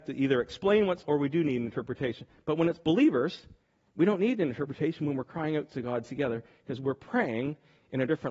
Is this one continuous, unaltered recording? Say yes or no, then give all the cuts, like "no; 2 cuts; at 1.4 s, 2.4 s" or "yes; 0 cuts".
no; 2 cuts; at 1.0 s, 3.6 s